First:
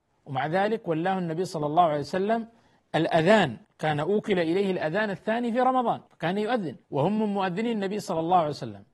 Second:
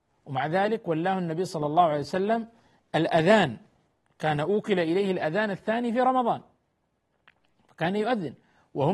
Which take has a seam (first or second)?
first